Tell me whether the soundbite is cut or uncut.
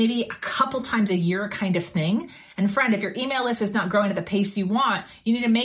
uncut